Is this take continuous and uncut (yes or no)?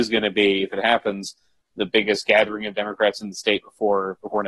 yes